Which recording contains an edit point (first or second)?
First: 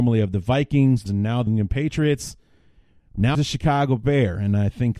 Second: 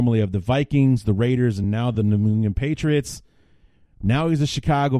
first